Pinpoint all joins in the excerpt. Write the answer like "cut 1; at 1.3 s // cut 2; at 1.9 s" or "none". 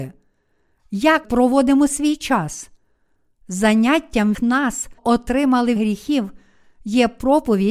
cut 1; at 1.2 s // cut 2; at 4.3 s // cut 3; at 5.0 s // cut 4; at 5.8 s